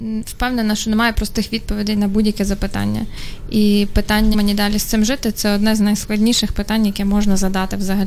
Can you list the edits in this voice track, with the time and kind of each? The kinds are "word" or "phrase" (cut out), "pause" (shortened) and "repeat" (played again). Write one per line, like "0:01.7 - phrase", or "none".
0:04.3 - word